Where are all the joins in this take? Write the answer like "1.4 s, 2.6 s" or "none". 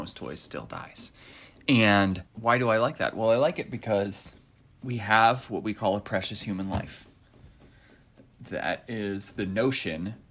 2.3 s, 4.6 s